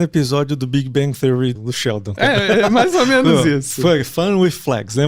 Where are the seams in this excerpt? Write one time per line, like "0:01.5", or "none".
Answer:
0:01.5